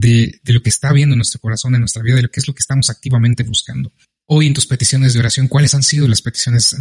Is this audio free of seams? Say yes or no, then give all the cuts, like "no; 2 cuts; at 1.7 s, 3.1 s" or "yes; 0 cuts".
yes; 0 cuts